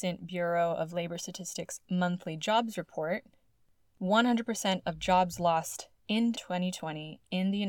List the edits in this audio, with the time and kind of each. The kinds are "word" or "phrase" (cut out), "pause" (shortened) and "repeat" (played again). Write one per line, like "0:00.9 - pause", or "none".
0:06.3 - word